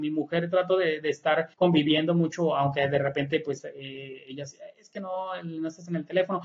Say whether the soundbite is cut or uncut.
cut